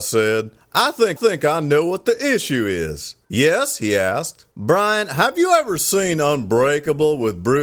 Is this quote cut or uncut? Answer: cut